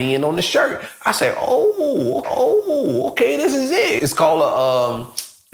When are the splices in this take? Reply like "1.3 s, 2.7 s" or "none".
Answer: 2.2 s, 4.0 s